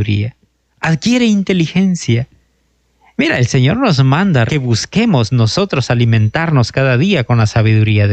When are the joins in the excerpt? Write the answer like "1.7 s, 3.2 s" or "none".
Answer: 4.5 s